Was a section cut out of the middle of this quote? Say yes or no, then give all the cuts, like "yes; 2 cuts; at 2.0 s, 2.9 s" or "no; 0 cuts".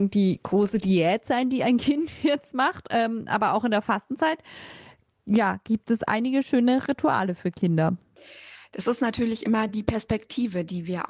no; 0 cuts